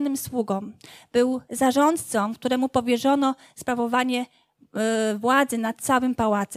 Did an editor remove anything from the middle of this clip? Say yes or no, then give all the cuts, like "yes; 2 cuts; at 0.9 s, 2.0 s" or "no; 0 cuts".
no; 0 cuts